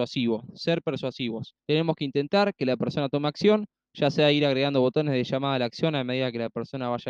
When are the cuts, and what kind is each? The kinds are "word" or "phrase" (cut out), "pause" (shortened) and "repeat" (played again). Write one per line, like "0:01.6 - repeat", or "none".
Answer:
0:01.6 - pause